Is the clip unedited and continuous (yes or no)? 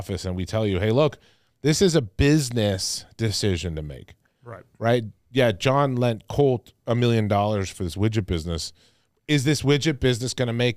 yes